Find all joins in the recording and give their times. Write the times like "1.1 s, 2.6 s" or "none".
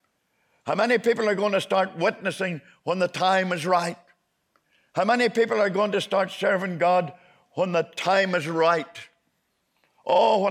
none